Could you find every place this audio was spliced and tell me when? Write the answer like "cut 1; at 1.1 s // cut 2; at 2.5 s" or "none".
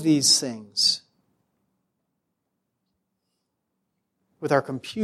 none